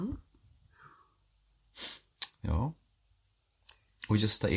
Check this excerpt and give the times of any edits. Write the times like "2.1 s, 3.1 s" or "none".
none